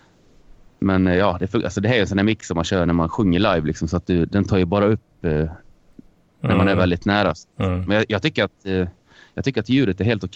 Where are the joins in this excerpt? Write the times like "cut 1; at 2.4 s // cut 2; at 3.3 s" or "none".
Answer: none